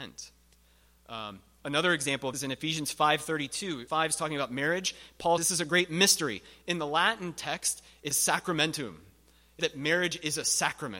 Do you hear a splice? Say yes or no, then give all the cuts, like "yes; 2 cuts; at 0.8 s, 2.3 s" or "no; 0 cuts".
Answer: yes; 5 cuts; at 2.3 s, 3.9 s, 5.4 s, 8.1 s, 9.6 s